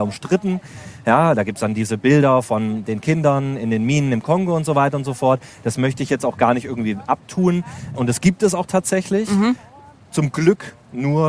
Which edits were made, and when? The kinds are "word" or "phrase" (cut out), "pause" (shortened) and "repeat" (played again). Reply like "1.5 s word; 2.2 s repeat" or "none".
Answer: none